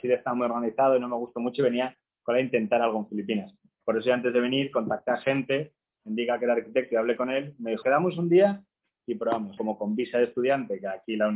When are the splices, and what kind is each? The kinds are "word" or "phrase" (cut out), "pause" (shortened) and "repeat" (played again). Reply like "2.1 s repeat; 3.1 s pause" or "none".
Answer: 7.8 s word; 9.6 s phrase

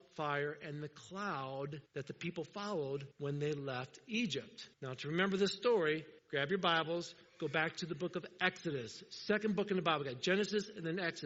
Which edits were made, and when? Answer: 1.9 s pause; 3.1 s pause; 4.7 s pause; 6.2 s pause

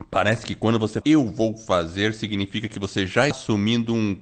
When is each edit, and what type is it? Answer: 1.0 s word; 3.3 s word

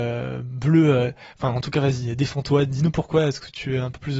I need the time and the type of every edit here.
none

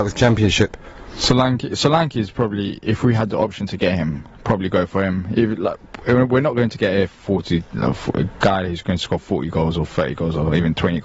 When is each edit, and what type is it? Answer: none

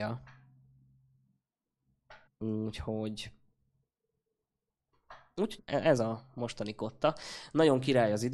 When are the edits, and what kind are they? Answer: 2.3 s pause; 5.6 s word; 6.0 s phrase

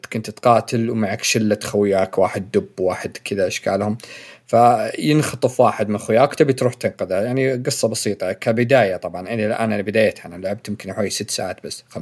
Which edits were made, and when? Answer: none

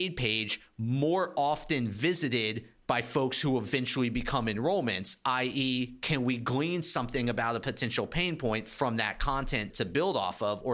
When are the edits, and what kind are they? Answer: 9.7 s word

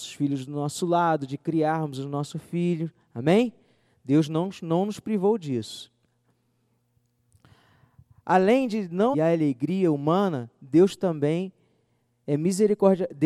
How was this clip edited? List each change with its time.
9.1 s phrase

